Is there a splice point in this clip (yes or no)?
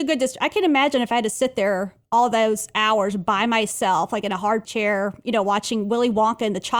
yes